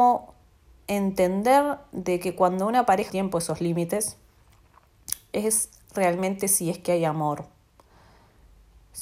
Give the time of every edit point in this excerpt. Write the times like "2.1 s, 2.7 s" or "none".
3.1 s